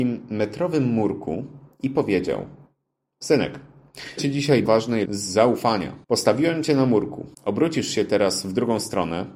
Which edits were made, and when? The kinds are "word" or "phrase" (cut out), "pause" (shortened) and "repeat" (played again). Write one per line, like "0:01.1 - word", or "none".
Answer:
0:04.2 - word
0:04.7 - word
0:05.1 - word
0:06.0 - pause
0:07.3 - pause